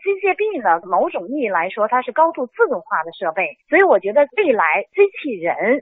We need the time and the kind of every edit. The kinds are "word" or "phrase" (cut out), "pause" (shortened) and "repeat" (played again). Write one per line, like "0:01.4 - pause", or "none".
0:03.6 - pause

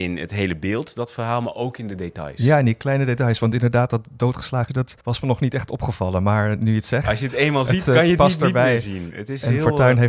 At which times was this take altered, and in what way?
0:04.7 - word
0:05.0 - pause

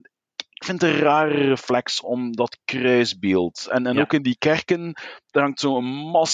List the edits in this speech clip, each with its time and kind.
0:02.0 - word

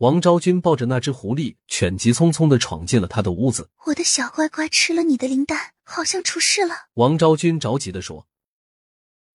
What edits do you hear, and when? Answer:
0:03.7 - pause
0:05.8 - pause
0:06.9 - pause

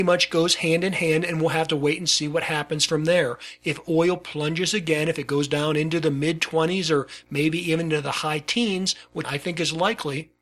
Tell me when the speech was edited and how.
0:09.2 - word

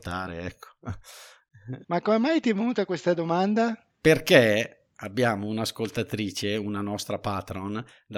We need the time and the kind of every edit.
none

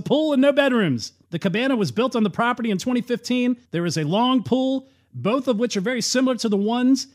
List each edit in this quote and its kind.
0:01.2 - pause
0:03.6 - pause

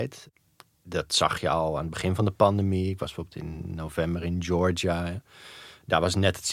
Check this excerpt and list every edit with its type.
none

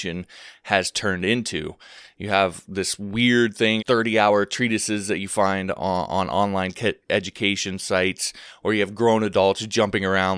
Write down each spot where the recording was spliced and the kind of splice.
0:03.8 - phrase
0:07.0 - pause

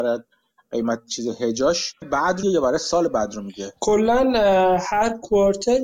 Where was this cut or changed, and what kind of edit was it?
0:02.0 - phrase
0:02.4 - word

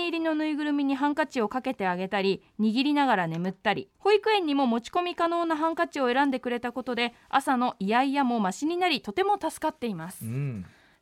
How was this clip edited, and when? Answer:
0:03.9 - pause

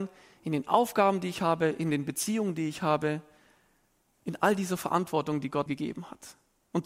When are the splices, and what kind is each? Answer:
0:05.7 - word

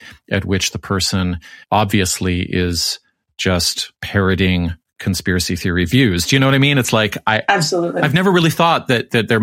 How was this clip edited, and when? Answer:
0:01.6 - pause
0:03.9 - pause

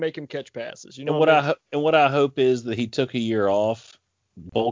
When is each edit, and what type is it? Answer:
none

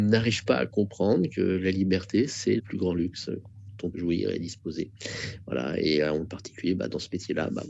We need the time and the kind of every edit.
0:02.6 - word
0:03.9 - word

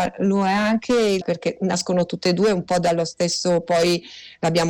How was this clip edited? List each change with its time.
0:01.2 - word

